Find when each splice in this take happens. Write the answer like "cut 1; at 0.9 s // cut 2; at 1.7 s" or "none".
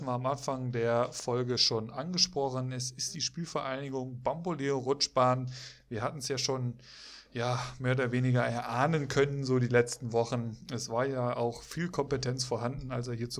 none